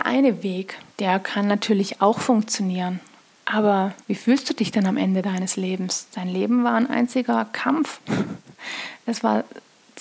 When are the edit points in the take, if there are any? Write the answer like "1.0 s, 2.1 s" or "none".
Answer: 0.9 s, 4.0 s